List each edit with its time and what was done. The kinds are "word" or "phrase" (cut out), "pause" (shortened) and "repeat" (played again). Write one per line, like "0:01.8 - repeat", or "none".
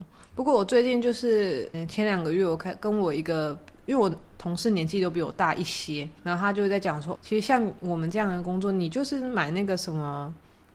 0:01.7 - word
0:06.2 - word
0:07.2 - word